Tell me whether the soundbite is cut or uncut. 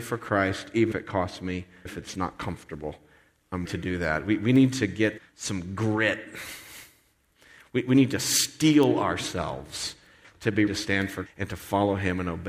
cut